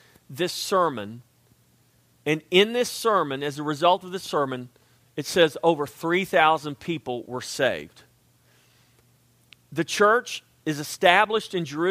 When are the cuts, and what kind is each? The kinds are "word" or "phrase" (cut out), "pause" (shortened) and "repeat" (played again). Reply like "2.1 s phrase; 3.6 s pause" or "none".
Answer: none